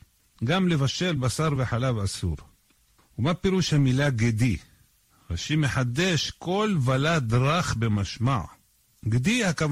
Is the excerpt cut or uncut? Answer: uncut